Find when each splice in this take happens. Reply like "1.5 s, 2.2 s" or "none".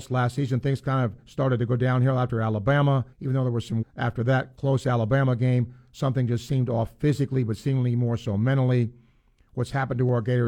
3.1 s, 3.8 s